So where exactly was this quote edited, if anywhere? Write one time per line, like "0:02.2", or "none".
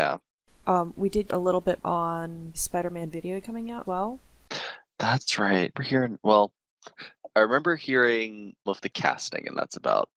0:00.9
0:01.3
0:01.8
0:02.5
0:03.4
0:03.8
0:05.7
0:07.3
0:08.7

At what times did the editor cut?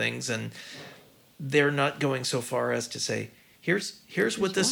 none

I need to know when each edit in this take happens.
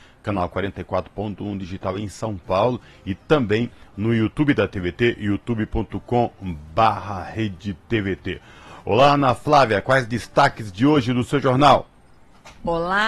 none

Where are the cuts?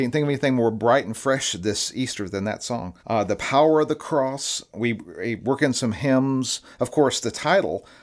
0:03.0

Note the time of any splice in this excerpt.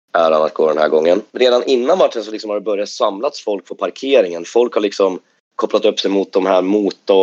none

